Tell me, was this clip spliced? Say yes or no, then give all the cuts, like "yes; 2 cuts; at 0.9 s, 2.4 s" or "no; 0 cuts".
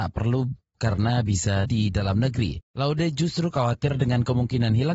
yes; 2 cuts; at 1.6 s, 2.7 s